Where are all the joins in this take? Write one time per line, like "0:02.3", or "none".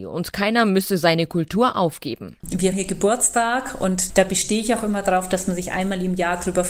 0:02.7